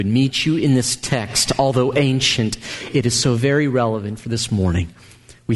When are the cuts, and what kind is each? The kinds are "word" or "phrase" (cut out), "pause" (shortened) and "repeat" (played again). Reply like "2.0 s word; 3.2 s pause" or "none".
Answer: none